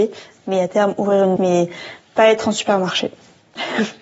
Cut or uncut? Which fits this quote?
cut